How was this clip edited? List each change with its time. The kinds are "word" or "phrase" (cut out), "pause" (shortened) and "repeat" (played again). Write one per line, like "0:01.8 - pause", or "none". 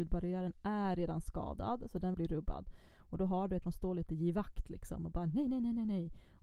0:02.1 - phrase
0:03.6 - word